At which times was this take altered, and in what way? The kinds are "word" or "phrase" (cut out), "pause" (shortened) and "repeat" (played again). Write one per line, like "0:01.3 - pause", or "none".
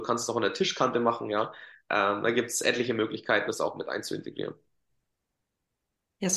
0:03.5 - word